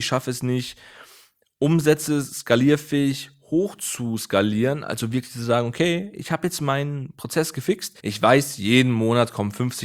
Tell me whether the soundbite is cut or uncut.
cut